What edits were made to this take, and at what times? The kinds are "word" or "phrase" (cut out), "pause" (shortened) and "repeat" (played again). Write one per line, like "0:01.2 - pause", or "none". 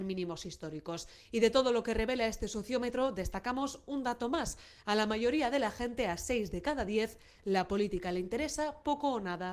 none